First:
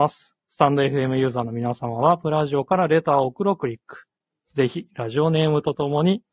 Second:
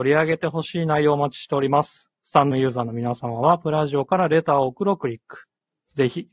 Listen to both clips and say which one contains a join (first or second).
second